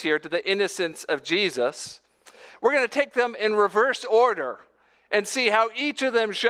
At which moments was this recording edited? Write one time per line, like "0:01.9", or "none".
none